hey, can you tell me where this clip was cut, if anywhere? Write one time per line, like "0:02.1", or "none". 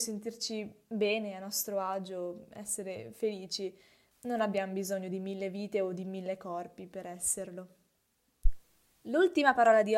none